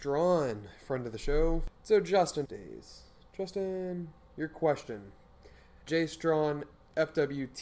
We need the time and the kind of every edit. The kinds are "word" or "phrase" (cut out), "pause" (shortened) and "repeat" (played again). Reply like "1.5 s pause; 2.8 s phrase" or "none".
2.4 s phrase; 5.9 s word